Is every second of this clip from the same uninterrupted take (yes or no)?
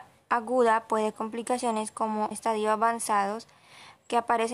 no